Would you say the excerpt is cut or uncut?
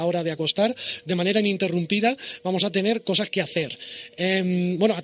uncut